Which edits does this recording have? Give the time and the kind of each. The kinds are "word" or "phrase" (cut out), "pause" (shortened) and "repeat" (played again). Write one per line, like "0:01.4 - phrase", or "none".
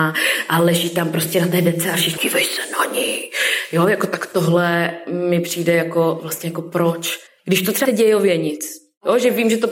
0:02.2 - phrase
0:07.3 - pause
0:07.8 - word